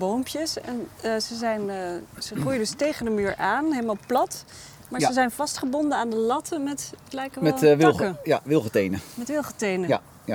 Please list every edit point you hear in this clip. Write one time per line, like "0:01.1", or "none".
none